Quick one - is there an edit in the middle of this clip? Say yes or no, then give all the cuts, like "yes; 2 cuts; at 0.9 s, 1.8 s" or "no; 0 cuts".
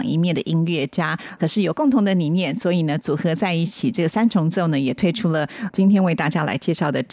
yes; 1 cut; at 1.4 s